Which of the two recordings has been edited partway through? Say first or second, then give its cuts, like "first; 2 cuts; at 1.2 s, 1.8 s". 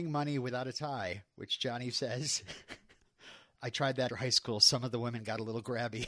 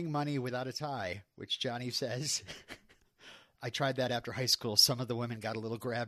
first; 1 cut; at 4.1 s